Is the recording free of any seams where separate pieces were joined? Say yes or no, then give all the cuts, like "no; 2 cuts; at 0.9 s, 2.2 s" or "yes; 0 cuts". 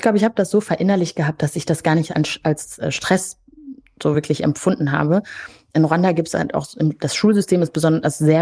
yes; 0 cuts